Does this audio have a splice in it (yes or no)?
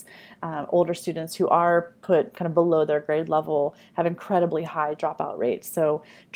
no